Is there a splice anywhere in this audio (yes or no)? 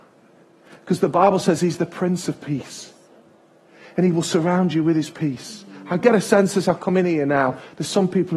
no